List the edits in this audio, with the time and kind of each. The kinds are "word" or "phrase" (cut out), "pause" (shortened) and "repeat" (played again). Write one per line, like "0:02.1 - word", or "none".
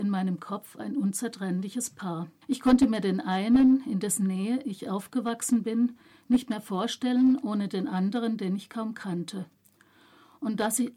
0:02.4 - pause